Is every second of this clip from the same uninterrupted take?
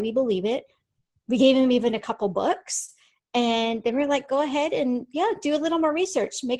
yes; 0 cuts

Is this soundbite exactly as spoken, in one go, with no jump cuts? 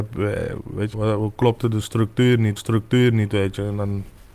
no; 2 cuts; at 0.9 s, 2.6 s

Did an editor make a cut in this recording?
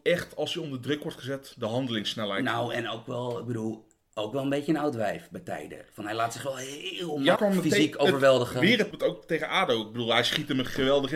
yes; 2 cuts; at 7.4 s, 8.9 s

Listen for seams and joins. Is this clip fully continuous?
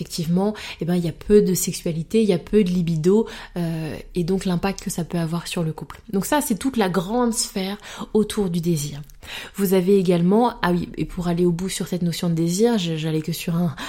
yes; 0 cuts

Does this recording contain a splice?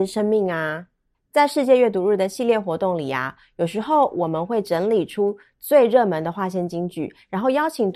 no; 0 cuts

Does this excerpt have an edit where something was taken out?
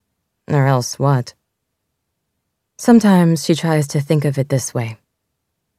no; 0 cuts

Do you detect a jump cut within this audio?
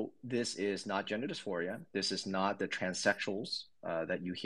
no; 0 cuts

